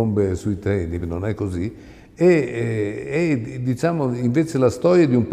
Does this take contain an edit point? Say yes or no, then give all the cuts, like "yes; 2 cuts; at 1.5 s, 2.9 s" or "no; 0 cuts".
no; 0 cuts